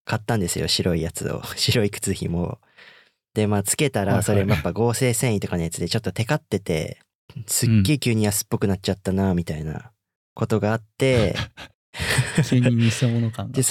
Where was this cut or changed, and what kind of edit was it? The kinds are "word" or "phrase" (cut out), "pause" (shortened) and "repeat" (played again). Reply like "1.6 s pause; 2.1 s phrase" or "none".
10.2 s pause; 11.7 s pause